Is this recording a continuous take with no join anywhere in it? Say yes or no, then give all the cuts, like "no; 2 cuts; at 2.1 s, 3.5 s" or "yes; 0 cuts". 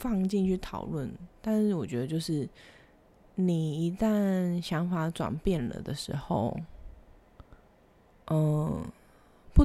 yes; 0 cuts